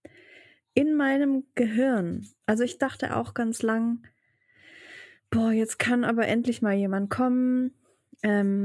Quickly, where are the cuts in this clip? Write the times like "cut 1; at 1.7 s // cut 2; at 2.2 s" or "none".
none